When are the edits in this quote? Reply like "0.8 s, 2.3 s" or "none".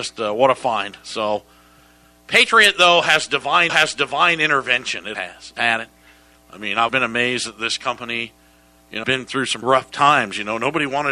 3.7 s, 5.1 s, 5.6 s, 6.9 s, 9.0 s, 9.6 s